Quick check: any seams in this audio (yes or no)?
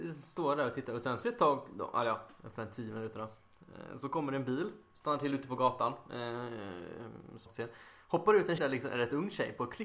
yes